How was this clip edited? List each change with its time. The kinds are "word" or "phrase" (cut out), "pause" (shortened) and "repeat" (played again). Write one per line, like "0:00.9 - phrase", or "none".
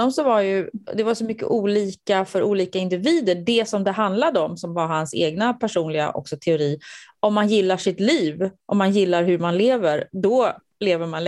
0:08.6 - pause